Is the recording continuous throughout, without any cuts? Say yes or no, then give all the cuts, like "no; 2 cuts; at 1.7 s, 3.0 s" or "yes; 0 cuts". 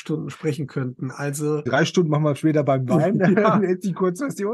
no; 1 cut; at 1.7 s